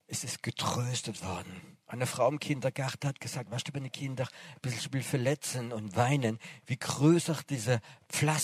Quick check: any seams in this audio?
yes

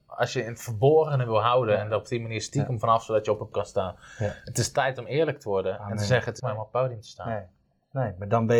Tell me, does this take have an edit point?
yes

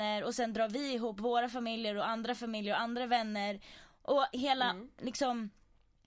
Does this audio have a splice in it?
no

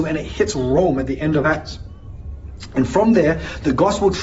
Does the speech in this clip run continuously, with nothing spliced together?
yes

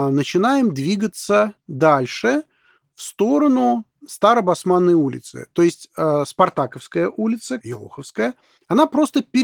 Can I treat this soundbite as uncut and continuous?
no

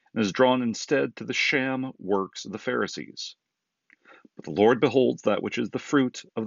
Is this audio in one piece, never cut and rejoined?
yes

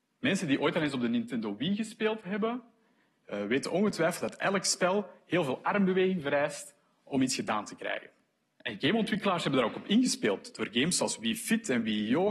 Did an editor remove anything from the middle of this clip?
no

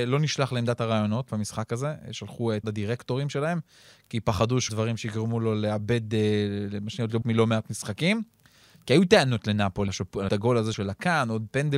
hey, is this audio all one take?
no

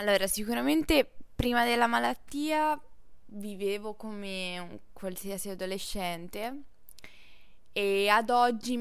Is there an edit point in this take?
no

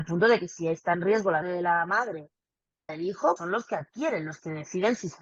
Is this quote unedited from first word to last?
no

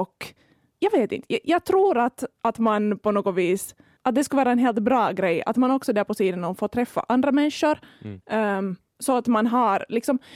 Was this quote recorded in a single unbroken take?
no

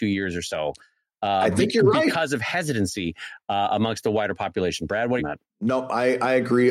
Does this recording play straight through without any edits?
no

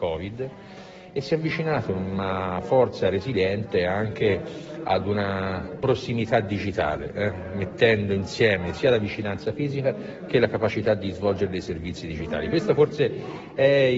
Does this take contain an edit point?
no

